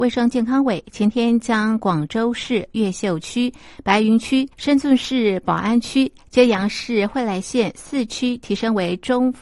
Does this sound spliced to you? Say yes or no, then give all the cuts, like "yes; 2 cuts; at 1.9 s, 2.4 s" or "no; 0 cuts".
yes; 1 cut; at 4.5 s